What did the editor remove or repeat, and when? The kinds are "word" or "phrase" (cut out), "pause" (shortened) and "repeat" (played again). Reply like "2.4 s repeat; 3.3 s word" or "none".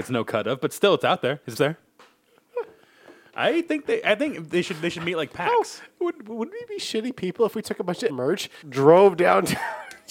1.5 s word; 7.6 s word; 8.1 s word; 8.6 s word